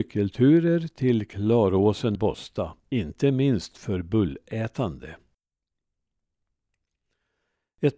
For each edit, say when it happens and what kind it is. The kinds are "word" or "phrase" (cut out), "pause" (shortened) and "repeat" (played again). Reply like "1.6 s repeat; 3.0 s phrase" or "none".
2.2 s word; 2.8 s pause